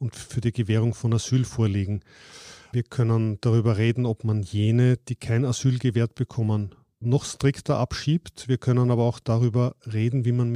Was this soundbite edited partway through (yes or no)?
no